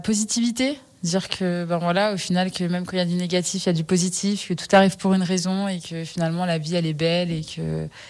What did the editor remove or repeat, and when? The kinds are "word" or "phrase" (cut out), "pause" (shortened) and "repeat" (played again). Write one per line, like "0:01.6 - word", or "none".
none